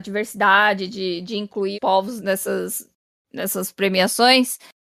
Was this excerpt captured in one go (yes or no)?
no